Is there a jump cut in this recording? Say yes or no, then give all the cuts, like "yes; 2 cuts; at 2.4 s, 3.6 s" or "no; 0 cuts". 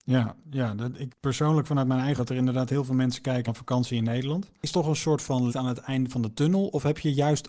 yes; 5 cuts; at 1.1 s, 2.2 s, 3.5 s, 4.7 s, 5.5 s